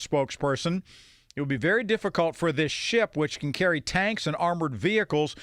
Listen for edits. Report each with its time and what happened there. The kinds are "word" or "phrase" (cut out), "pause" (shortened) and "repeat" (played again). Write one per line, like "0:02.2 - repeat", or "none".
none